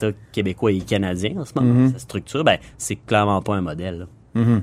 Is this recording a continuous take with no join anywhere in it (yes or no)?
yes